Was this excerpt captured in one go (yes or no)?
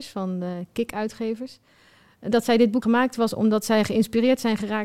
no